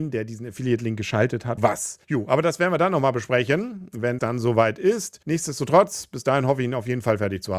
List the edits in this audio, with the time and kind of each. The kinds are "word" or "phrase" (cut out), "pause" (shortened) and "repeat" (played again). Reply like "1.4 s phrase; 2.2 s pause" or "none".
1.6 s word; 2.0 s pause; 4.2 s word; 5.2 s pause